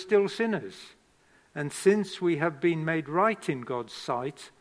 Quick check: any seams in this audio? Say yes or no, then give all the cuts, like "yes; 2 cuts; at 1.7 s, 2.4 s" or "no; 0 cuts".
no; 0 cuts